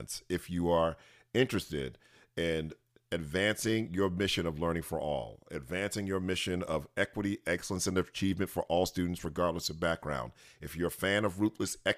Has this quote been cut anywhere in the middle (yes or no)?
no